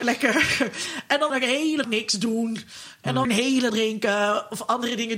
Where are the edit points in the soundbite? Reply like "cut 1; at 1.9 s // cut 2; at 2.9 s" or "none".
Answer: cut 1; at 1.3 s // cut 2; at 1.8 s // cut 3; at 3.2 s // cut 4; at 3.7 s